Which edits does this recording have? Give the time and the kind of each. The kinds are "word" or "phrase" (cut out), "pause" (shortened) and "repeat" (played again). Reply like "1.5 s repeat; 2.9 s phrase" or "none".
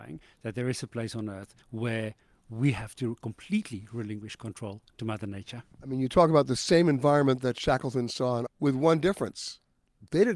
1.6 s pause; 5.7 s pause; 8.5 s phrase